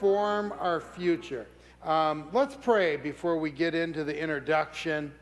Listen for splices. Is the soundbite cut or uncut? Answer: cut